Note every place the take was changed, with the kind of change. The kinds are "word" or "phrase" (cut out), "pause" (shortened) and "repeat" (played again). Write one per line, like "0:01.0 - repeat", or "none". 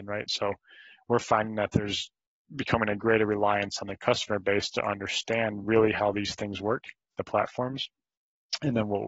none

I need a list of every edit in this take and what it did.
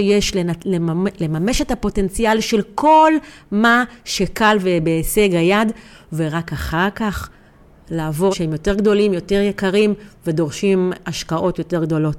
0:08.3 - word

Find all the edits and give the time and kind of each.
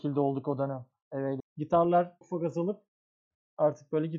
0:01.4 - word
0:02.2 - word

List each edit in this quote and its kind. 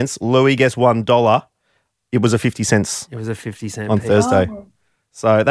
none

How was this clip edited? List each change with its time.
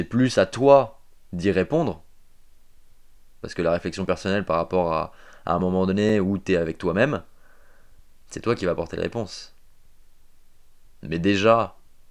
none

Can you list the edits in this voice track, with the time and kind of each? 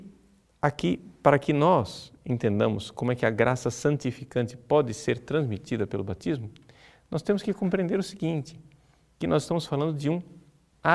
none

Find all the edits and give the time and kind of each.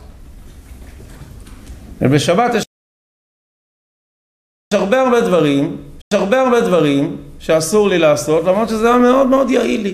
0:06.0 - repeat

